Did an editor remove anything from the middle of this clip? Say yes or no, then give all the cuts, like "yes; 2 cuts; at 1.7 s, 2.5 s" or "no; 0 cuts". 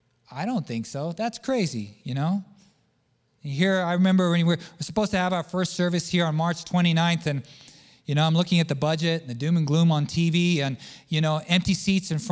no; 0 cuts